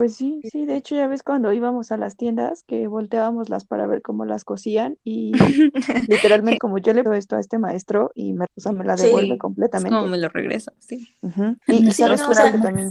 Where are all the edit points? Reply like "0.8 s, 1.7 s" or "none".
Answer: 3.7 s, 6.6 s, 7.1 s, 8.5 s, 11.6 s